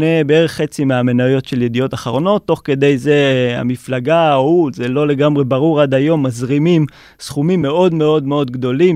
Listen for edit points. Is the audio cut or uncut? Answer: uncut